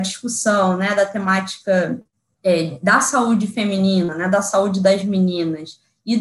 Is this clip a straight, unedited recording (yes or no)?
yes